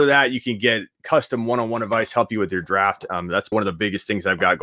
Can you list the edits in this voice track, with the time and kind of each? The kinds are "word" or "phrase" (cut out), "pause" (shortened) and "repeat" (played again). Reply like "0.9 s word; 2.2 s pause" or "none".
3.5 s word